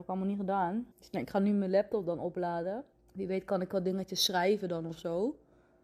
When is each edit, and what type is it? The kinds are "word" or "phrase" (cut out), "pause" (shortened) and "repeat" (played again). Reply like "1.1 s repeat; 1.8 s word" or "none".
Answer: 0.9 s pause; 2.9 s pause